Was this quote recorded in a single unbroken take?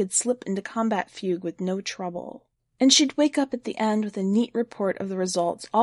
yes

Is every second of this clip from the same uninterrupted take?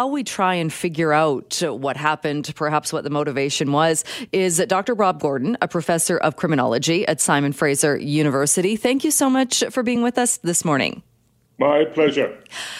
yes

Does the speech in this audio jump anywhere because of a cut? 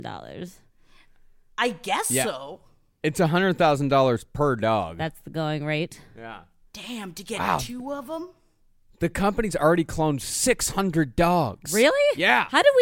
no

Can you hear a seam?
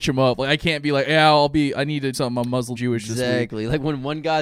yes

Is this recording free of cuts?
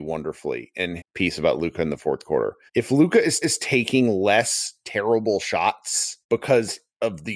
no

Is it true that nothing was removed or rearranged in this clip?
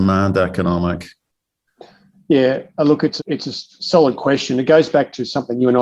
no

